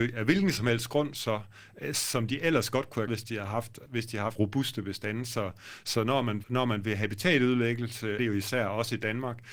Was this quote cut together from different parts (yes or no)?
yes